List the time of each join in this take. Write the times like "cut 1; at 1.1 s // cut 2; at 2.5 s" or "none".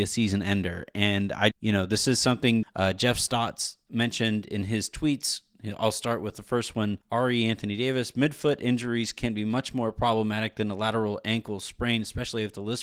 cut 1; at 1.5 s // cut 2; at 2.6 s // cut 3; at 7.0 s